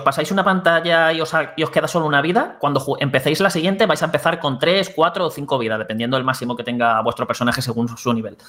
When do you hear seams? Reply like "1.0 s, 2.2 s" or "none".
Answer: none

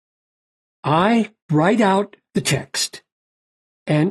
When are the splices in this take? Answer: 1.4 s

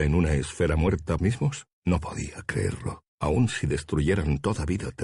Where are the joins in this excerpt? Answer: 1.2 s, 1.7 s, 3.1 s

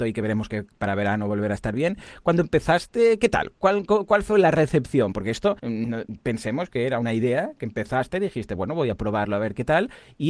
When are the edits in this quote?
5.6 s

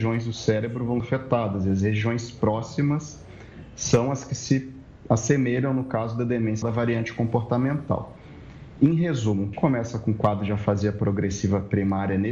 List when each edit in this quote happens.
1.0 s, 6.6 s, 9.5 s

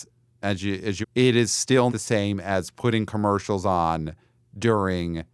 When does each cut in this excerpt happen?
1.0 s, 1.9 s

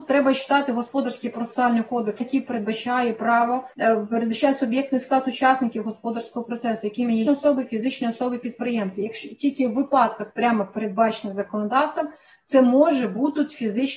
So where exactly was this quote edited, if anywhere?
2.2 s, 3.7 s, 7.3 s

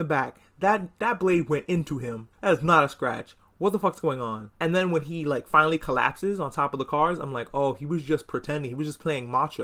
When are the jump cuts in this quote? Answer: 2.3 s, 4.6 s

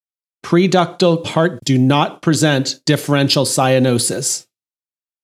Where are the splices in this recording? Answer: 1.2 s, 1.6 s, 2.8 s

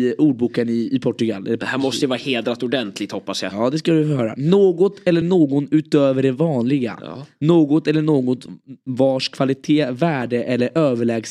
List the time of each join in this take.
none

